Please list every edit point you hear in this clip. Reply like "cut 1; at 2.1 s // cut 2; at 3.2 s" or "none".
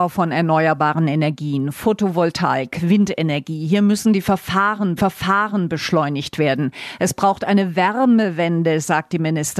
cut 1; at 5.0 s